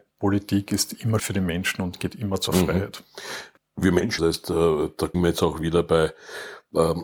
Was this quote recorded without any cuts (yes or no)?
no